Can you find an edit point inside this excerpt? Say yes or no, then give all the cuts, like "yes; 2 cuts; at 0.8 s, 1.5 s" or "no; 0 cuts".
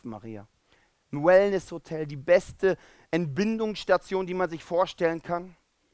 no; 0 cuts